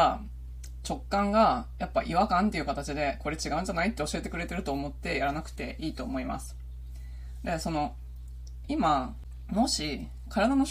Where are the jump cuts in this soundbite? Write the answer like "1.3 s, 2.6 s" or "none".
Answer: none